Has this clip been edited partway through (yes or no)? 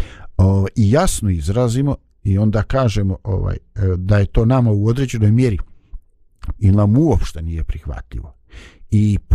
yes